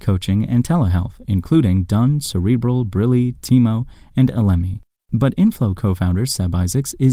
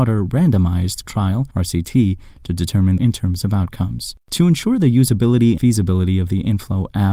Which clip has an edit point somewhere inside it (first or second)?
second